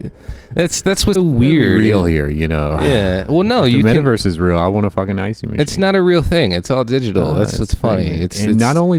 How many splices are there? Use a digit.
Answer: 1